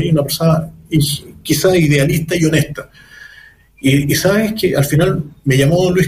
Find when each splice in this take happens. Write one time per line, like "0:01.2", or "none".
none